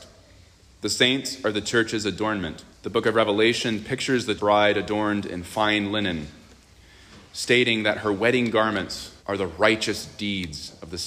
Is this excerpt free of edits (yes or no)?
no